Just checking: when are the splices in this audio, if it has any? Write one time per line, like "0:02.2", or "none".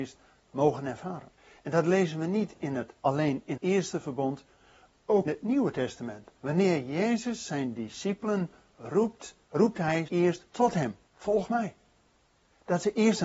0:01.4
0:03.0
0:03.6
0:05.3
0:06.4
0:09.4
0:10.1
0:10.5
0:11.1